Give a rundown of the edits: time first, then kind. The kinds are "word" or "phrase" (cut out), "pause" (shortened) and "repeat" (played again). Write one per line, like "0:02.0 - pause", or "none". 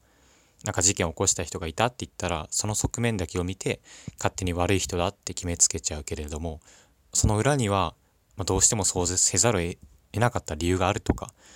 none

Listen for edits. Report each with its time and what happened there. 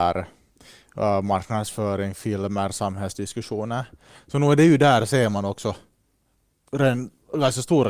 none

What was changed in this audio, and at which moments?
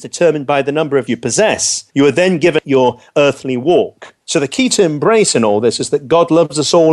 0:01.1 - phrase
0:01.9 - pause
0:02.6 - phrase
0:04.2 - pause
0:04.7 - word

